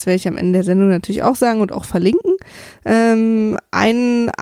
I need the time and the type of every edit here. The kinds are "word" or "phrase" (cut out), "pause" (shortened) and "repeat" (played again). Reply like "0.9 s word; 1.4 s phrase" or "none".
none